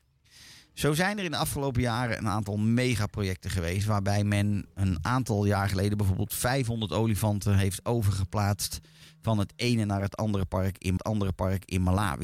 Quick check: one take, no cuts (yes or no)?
no